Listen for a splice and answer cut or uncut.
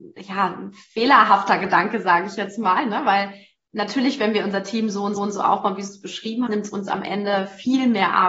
cut